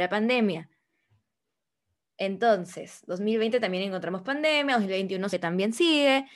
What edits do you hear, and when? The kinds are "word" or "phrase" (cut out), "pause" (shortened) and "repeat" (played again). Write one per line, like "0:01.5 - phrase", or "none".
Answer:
0:05.3 - word